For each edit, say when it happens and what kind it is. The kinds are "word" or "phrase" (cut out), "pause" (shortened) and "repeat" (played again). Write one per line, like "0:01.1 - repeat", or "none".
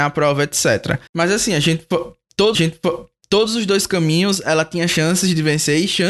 0:01.1 - pause
0:02.5 - repeat